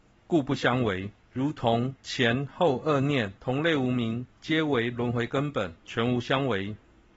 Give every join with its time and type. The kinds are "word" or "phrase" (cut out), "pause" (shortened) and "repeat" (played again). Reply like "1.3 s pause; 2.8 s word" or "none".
1.2 s pause; 2.0 s pause; 3.4 s pause; 4.3 s pause; 5.8 s pause